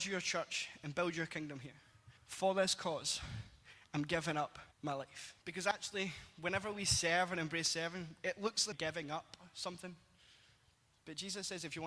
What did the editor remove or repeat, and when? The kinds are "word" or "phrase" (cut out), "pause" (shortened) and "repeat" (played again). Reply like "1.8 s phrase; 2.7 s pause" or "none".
2.2 s pause; 4.7 s pause; 5.4 s pause; 8.7 s phrase